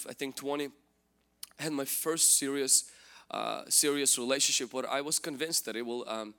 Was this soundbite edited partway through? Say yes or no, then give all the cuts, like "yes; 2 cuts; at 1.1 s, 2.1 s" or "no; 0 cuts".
no; 0 cuts